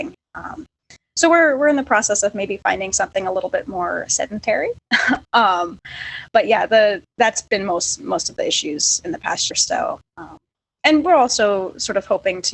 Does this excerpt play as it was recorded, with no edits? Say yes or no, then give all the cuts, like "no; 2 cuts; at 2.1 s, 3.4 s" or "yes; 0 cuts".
no; 1 cut; at 9.5 s